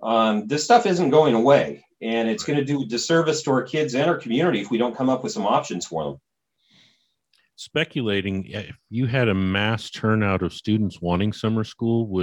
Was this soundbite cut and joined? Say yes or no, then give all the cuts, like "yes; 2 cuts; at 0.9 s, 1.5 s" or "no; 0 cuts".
no; 0 cuts